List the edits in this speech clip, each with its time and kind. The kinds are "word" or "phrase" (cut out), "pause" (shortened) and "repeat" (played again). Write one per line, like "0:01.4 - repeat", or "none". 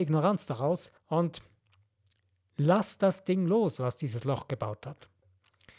0:01.0 - pause